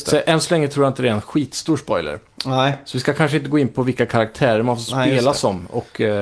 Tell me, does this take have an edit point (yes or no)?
no